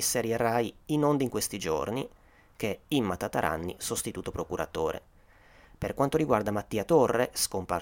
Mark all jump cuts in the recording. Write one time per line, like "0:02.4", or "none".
none